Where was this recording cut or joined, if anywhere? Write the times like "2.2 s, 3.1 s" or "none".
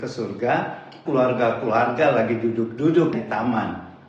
1.1 s, 3.1 s